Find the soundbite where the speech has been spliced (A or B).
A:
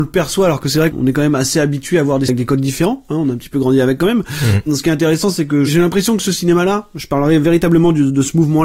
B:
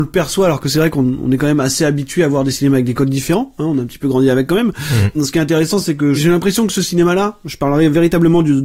A